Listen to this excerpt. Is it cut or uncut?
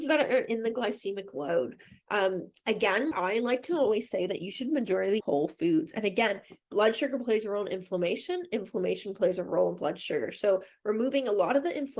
cut